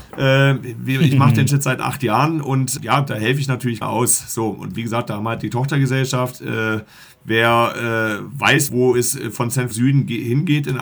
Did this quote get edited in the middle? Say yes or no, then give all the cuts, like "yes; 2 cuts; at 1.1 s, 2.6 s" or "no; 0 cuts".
yes; 6 cuts; at 1.5 s, 2.8 s, 3.8 s, 7.0 s, 8.7 s, 9.7 s